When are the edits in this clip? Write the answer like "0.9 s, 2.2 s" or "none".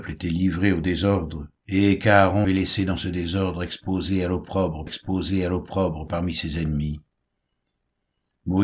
1.6 s, 2.4 s, 4.9 s